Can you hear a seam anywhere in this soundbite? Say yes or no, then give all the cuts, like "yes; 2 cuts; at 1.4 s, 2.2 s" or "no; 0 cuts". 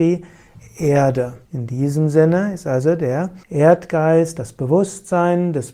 yes; 2 cuts; at 1.4 s, 3.4 s